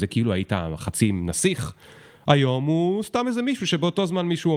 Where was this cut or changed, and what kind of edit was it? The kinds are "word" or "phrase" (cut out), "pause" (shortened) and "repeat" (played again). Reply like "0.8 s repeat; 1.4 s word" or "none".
none